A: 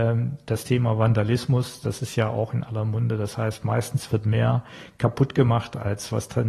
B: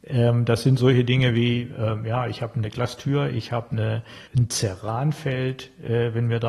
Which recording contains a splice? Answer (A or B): B